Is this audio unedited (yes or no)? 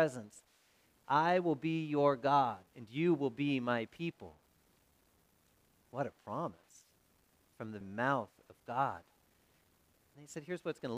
no